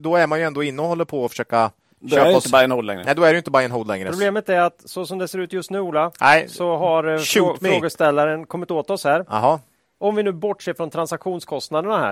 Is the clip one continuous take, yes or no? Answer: no